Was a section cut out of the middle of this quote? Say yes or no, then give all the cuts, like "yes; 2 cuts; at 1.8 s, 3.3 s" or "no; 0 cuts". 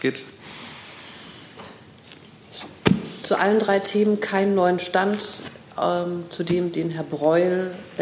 no; 0 cuts